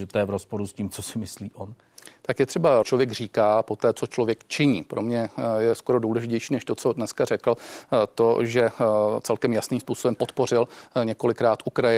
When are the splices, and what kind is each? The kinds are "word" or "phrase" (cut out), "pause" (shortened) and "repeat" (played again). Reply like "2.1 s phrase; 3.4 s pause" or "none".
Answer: 2.8 s phrase